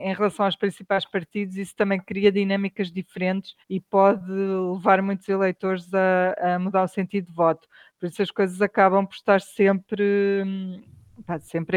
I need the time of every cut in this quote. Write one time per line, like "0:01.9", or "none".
0:03.6